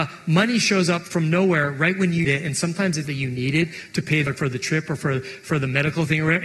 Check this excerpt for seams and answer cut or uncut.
cut